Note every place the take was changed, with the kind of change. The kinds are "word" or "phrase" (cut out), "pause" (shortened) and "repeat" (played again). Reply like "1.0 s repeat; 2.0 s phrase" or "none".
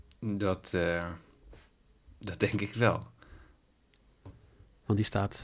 none